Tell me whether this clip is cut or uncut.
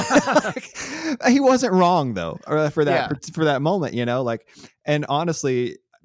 uncut